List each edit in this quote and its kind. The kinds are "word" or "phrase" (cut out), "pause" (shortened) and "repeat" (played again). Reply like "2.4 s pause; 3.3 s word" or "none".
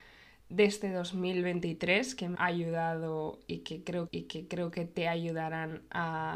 2.3 s word; 4.1 s repeat